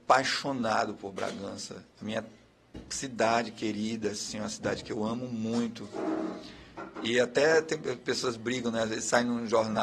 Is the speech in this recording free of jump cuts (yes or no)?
no